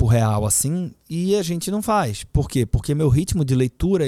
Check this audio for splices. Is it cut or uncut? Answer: uncut